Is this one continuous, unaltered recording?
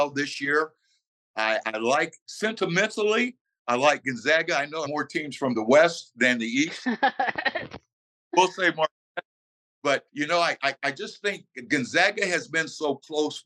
no; 2 cuts; at 4.9 s, 10.1 s

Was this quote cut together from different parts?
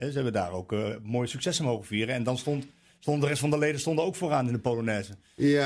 no; 0 cuts

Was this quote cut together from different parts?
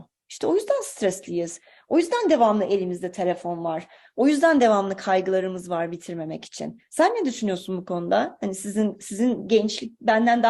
no; 0 cuts

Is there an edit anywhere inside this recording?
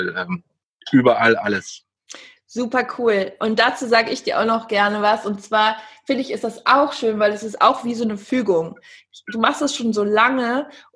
no; 0 cuts

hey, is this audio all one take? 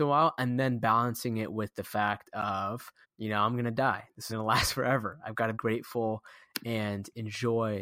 no; 3 cuts; at 3.0 s, 4.3 s, 5.5 s

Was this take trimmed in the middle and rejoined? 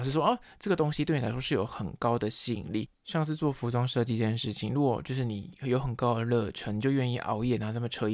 yes; 1 cut; at 2.9 s

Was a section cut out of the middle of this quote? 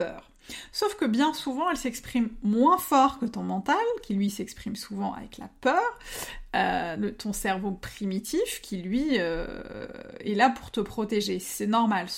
no; 0 cuts

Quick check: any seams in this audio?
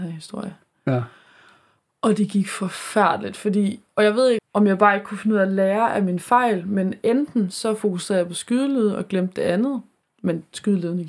yes; 1 cut; at 4.4 s

